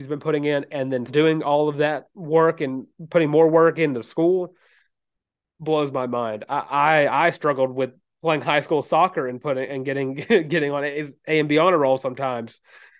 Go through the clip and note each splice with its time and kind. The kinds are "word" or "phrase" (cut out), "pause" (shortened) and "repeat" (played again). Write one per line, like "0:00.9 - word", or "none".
0:01.1 - word